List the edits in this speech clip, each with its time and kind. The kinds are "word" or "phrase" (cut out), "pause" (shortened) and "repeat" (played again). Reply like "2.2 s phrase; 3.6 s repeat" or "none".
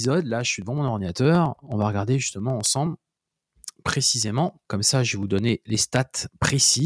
4.6 s pause